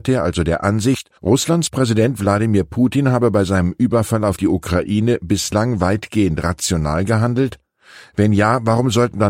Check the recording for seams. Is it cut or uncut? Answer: cut